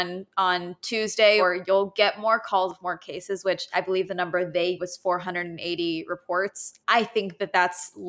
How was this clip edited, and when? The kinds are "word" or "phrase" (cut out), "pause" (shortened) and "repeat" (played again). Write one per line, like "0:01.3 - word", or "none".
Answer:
0:04.8 - word
0:06.8 - pause